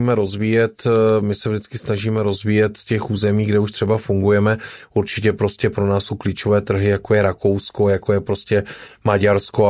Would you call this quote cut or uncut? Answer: uncut